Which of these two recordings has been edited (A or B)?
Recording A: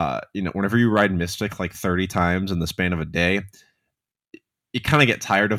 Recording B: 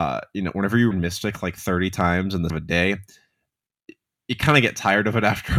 B